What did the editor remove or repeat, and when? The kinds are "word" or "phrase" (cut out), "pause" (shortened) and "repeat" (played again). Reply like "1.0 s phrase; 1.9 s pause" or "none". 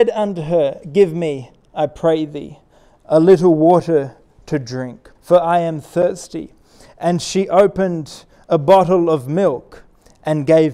5.2 s pause